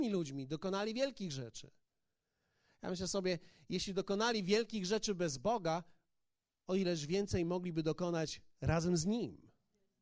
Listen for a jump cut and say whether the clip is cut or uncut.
uncut